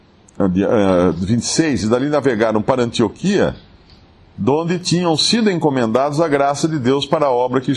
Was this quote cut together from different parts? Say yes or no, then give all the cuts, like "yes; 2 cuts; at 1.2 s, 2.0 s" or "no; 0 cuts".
no; 0 cuts